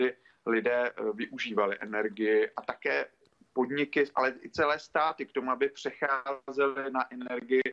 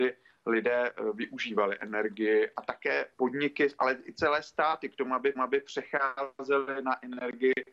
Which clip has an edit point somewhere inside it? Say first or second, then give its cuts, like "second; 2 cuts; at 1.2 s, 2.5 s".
second; 2 cuts; at 3.1 s, 5.3 s